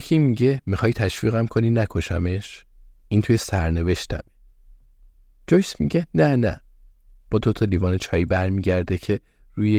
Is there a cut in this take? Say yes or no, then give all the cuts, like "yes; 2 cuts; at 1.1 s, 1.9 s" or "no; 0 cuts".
no; 0 cuts